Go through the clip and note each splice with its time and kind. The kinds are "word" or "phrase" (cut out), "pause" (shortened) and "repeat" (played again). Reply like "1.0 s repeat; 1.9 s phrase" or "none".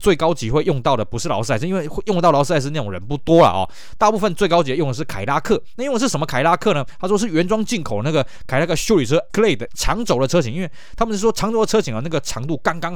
9.3 s word; 9.7 s word